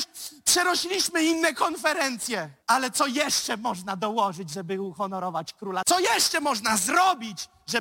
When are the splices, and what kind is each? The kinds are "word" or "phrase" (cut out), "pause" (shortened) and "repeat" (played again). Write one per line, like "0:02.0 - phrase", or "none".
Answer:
0:02.6 - pause